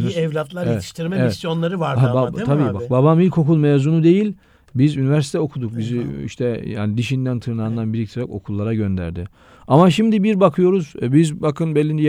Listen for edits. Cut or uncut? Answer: uncut